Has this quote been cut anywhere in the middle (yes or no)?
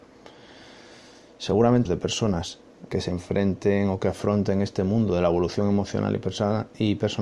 yes